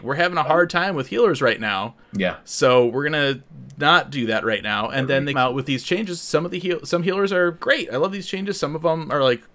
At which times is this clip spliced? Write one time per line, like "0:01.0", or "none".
0:02.0
0:05.3
0:07.6